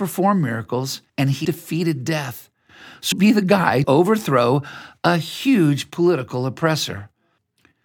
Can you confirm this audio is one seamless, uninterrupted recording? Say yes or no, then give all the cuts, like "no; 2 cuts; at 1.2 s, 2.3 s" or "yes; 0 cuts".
no; 4 cuts; at 1.1 s, 1.4 s, 3.1 s, 3.8 s